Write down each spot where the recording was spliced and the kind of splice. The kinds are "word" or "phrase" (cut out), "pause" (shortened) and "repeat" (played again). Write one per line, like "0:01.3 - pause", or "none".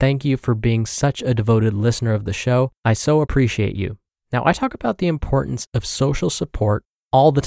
0:02.8 - pause
0:04.1 - pause

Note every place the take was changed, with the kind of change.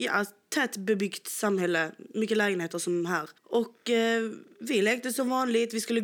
0:03.4 - pause

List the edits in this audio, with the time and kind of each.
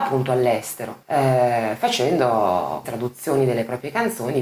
0:01.0 - pause
0:02.8 - word

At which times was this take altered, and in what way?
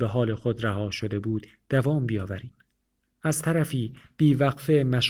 0:02.7 - pause

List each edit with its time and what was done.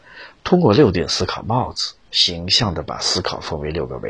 none

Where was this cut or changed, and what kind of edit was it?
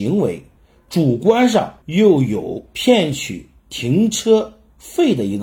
0:01.8 - pause

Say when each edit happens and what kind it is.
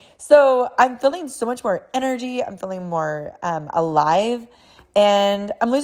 none

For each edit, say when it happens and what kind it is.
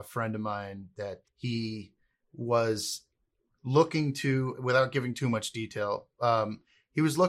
0:01.2 - word

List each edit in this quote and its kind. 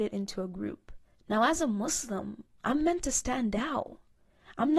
0:01.1 - pause

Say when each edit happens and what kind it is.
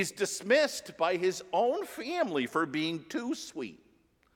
none

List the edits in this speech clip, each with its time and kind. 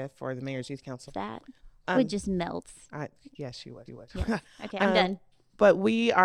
0:01.1 - phrase
0:01.9 - word
0:03.9 - repeat

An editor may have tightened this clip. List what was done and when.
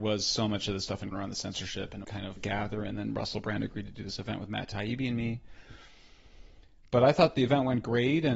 0:01.1 - word
0:02.0 - phrase
0:02.4 - phrase

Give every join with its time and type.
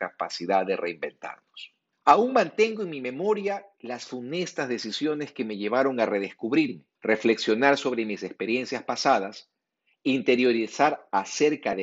0:01.9 - pause
0:07.0 - pause

